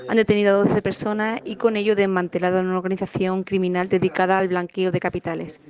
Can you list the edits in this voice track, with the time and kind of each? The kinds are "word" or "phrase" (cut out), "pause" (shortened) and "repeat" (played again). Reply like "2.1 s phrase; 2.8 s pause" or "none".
none